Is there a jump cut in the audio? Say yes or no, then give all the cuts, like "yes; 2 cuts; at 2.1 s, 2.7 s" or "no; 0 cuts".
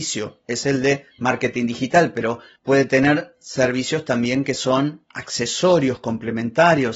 no; 0 cuts